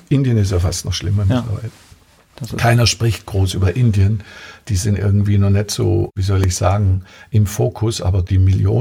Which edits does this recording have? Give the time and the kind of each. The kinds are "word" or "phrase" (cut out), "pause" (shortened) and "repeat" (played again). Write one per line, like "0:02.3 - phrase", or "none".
none